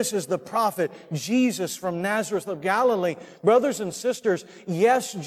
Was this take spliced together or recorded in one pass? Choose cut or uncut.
uncut